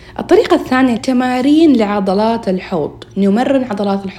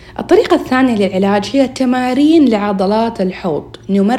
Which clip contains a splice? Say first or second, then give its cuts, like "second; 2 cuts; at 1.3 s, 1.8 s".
first; 1 cut; at 1.0 s